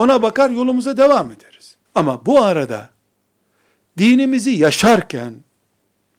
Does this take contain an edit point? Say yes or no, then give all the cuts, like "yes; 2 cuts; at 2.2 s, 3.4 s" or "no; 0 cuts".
yes; 1 cut; at 1.9 s